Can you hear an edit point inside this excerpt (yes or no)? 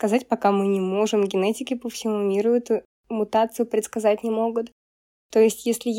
no